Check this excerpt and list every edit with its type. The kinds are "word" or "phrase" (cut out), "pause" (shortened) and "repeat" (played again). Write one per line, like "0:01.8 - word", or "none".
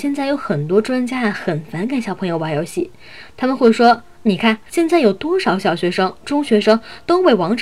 0:04.7 - pause